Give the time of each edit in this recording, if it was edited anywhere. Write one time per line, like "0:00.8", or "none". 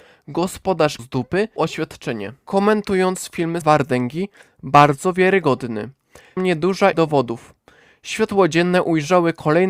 0:01.0
0:01.6
0:03.6
0:06.4
0:06.9